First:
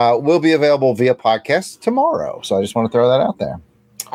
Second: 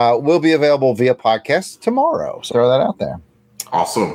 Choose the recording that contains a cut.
second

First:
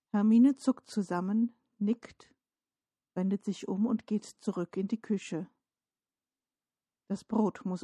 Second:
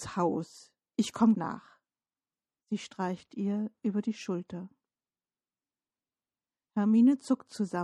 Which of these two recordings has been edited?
second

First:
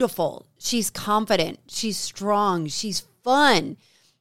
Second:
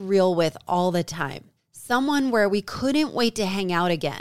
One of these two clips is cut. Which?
second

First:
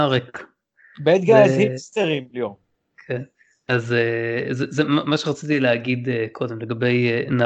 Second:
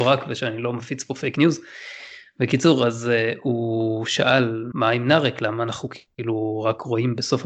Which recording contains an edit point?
second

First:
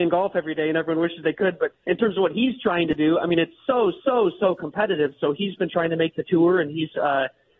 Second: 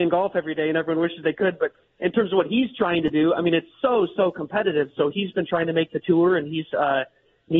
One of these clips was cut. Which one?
first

